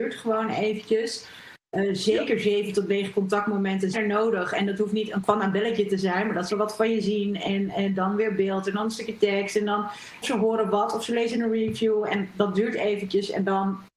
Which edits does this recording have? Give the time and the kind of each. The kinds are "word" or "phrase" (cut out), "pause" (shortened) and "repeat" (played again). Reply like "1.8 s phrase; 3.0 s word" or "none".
3.9 s word; 5.2 s word; 6.5 s word; 10.2 s phrase